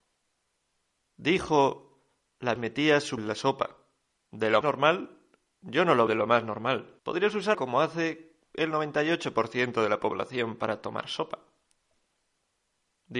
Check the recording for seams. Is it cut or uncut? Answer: cut